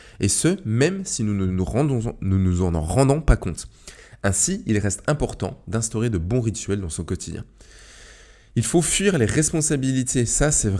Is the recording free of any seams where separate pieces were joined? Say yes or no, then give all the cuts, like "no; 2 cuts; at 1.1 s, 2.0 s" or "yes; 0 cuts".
yes; 0 cuts